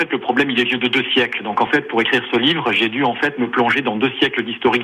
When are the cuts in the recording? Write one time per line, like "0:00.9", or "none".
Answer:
none